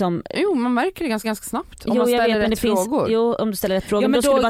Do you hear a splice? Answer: yes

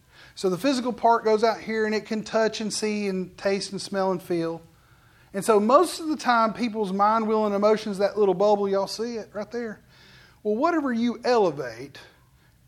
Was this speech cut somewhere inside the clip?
no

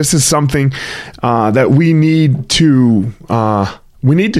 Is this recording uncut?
yes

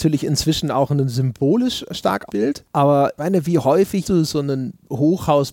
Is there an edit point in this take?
yes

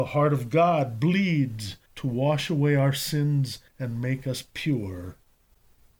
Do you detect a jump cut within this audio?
yes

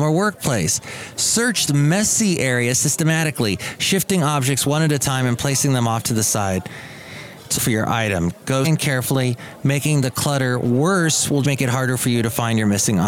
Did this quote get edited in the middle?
yes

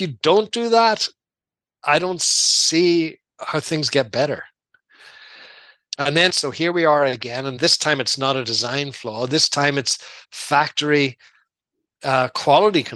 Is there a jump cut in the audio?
yes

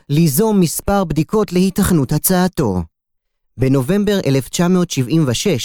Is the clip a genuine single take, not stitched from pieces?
yes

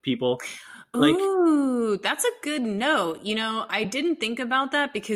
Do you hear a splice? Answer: no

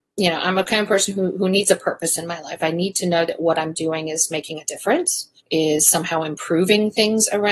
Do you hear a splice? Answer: yes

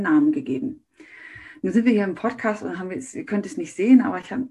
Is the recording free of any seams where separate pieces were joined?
yes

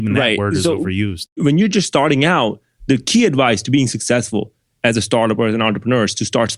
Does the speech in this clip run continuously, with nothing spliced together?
yes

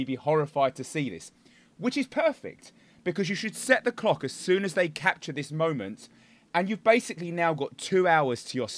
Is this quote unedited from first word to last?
yes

